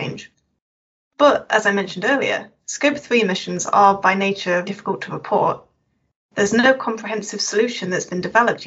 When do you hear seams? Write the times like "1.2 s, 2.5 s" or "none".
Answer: 4.7 s